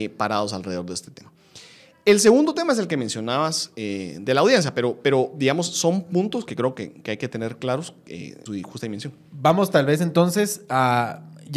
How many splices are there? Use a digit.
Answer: 1